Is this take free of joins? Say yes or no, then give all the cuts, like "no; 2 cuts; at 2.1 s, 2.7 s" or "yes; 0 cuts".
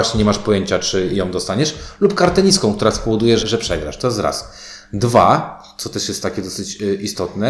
no; 1 cut; at 3.4 s